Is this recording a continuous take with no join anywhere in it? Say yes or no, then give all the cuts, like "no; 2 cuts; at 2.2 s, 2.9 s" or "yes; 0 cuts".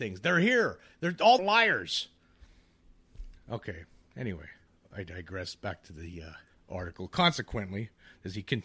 no; 3 cuts; at 1.4 s, 4.7 s, 6.5 s